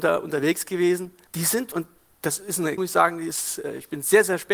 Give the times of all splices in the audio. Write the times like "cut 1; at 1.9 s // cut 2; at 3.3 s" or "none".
cut 1; at 1.3 s // cut 2; at 1.7 s // cut 3; at 2.8 s

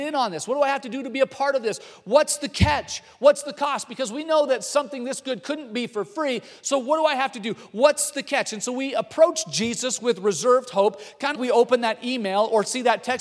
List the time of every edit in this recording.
cut 1; at 11.4 s

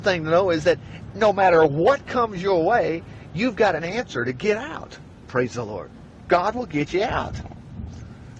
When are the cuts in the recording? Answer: none

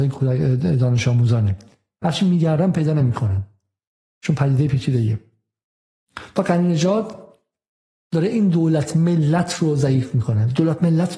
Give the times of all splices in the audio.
none

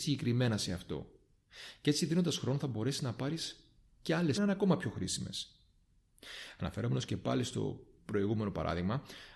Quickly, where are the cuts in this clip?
cut 1; at 4.3 s

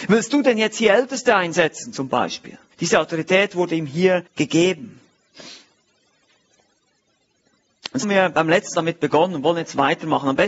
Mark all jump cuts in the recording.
cut 1; at 2.7 s // cut 2; at 4.3 s // cut 3; at 8.0 s // cut 4; at 8.7 s

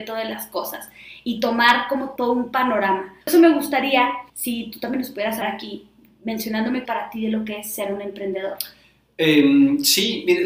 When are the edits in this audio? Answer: cut 1; at 2.2 s // cut 2; at 3.2 s // cut 3; at 4.3 s // cut 4; at 5.4 s // cut 5; at 6.9 s

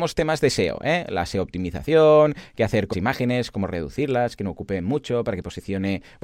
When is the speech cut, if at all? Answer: cut 1; at 2.9 s

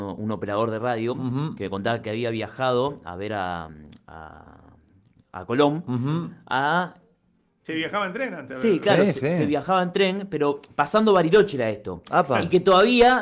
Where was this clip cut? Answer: none

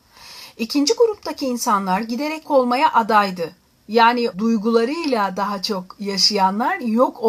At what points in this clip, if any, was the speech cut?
cut 1; at 2.4 s // cut 2; at 4.3 s

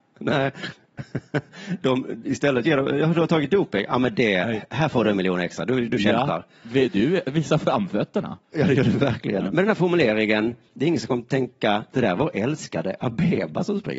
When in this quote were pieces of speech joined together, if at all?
cut 1; at 8.4 s

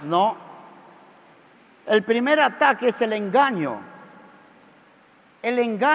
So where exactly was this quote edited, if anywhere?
none

